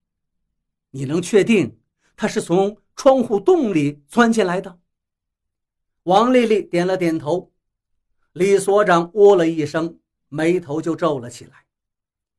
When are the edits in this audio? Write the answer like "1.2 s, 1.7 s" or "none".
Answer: none